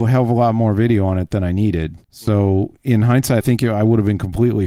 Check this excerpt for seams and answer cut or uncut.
cut